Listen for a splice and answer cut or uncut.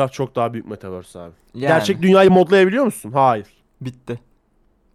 uncut